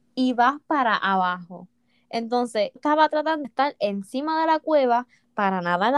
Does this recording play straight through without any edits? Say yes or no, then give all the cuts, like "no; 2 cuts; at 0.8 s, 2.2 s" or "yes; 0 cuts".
no; 2 cuts; at 2.8 s, 3.4 s